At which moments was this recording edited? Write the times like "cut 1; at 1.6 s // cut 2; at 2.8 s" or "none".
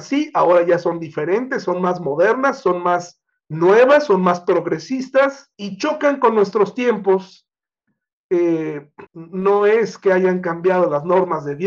cut 1; at 3.3 s // cut 2; at 5.5 s // cut 3; at 9.1 s